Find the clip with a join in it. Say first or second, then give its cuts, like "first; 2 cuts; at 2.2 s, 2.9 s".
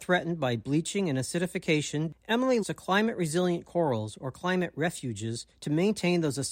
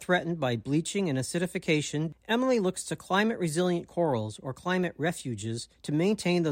first; 1 cut; at 2.6 s